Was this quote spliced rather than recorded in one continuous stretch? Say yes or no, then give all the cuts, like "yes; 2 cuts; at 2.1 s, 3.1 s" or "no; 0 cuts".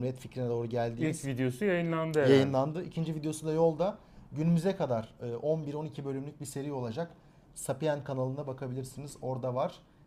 no; 0 cuts